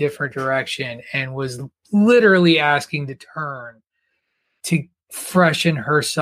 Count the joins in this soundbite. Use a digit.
0